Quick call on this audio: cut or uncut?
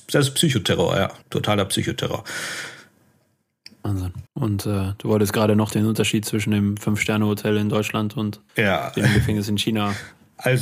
cut